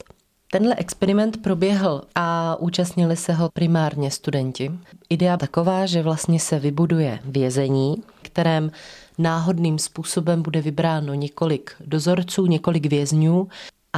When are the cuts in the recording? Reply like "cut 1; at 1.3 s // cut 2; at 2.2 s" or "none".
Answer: cut 1; at 2.1 s // cut 2; at 3.5 s // cut 3; at 5.4 s // cut 4; at 8.2 s